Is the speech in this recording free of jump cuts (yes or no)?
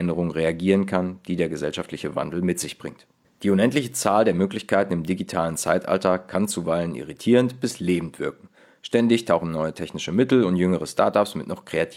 yes